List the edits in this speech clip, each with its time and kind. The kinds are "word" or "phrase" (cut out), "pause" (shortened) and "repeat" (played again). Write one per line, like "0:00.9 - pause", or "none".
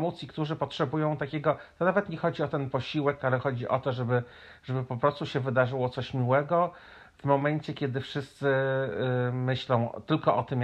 none